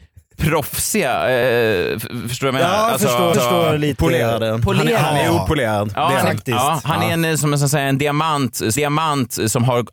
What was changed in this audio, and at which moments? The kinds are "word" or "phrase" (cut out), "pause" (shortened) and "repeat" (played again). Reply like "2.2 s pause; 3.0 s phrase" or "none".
3.3 s repeat; 7.4 s word; 8.8 s repeat